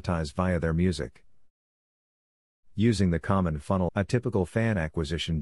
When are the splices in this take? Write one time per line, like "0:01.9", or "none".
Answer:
0:03.9